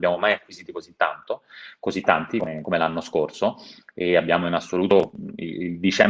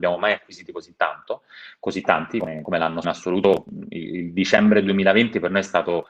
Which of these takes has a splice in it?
second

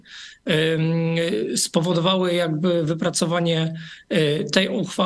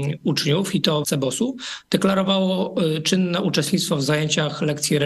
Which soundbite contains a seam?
second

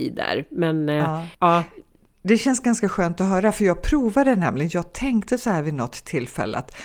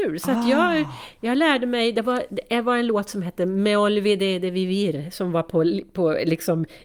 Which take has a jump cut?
first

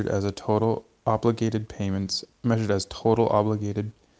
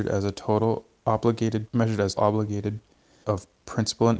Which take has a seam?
second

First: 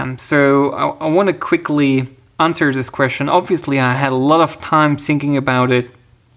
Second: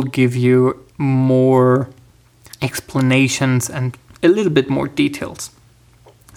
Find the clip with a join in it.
second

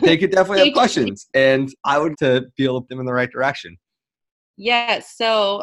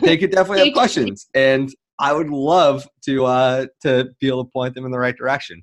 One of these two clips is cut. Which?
first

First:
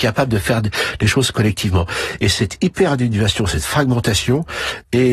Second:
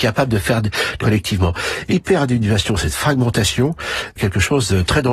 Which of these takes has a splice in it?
second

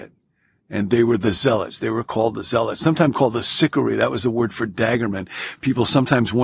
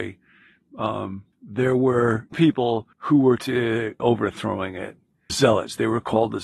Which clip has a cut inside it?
second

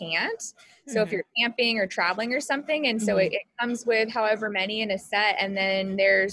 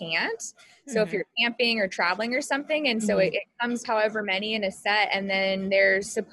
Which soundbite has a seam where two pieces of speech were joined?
second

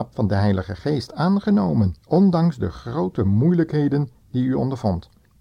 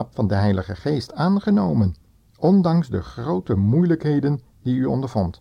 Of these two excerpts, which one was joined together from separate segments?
first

